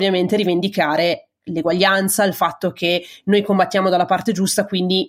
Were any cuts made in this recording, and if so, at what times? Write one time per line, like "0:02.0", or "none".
none